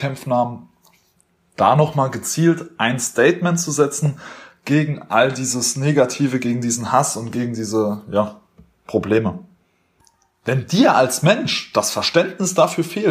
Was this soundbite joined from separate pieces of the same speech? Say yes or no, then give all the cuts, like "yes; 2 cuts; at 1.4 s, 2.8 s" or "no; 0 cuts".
no; 0 cuts